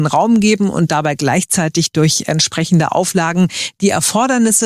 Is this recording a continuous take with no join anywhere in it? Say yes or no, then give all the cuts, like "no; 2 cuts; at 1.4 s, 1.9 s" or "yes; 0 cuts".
yes; 0 cuts